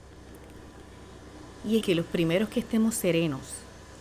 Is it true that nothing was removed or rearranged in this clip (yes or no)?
no